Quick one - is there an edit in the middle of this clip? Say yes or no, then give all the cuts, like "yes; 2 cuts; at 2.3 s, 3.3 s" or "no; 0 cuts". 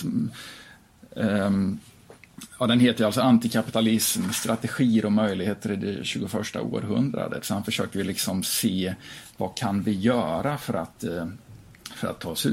no; 0 cuts